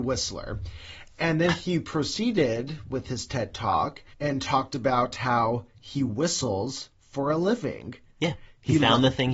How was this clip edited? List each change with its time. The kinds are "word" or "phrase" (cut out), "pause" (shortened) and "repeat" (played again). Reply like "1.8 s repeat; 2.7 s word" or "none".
4.1 s pause